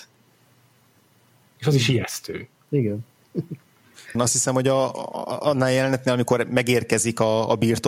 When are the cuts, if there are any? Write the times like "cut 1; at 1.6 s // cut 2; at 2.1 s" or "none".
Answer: cut 1; at 4.1 s